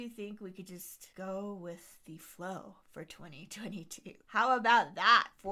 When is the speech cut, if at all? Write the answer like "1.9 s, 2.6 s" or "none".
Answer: 1.1 s, 4.2 s